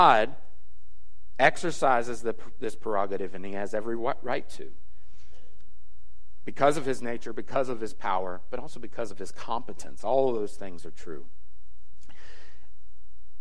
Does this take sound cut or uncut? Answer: uncut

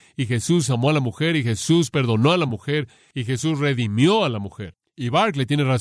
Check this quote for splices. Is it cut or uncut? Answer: uncut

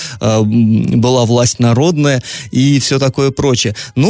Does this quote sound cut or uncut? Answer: uncut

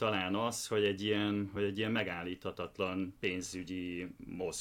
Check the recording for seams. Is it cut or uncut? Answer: uncut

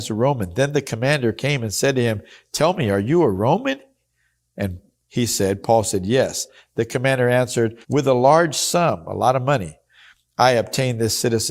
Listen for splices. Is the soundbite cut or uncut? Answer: cut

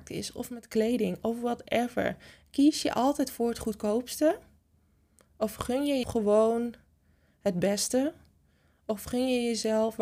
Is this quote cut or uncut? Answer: cut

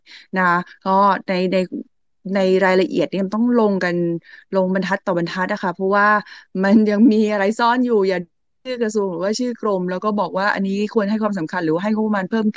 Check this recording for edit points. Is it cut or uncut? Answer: uncut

